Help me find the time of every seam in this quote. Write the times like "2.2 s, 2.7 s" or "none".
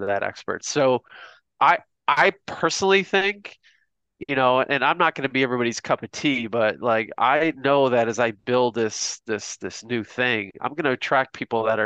none